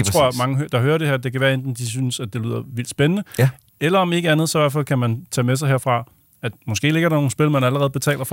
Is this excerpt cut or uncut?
uncut